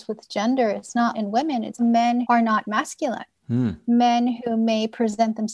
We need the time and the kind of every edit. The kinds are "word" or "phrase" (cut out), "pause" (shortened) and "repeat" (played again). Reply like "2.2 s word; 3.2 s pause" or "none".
1.1 s word; 1.8 s word; 2.2 s word; 2.6 s word